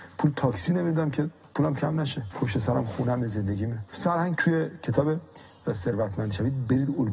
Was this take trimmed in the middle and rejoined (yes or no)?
yes